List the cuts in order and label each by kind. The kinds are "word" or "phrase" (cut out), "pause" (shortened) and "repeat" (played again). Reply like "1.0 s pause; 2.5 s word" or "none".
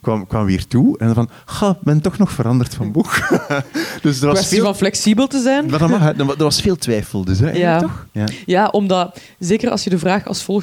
8.1 s pause